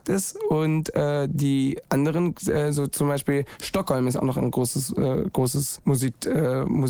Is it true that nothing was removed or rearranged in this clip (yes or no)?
yes